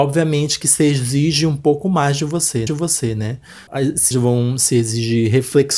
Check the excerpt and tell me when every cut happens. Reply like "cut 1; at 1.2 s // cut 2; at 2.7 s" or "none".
cut 1; at 2.7 s // cut 2; at 4.1 s